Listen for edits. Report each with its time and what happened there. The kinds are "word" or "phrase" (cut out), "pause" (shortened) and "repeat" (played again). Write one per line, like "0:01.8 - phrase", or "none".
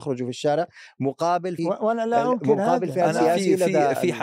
0:01.6 - phrase